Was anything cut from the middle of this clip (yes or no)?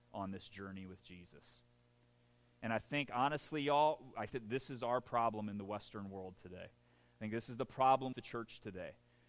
yes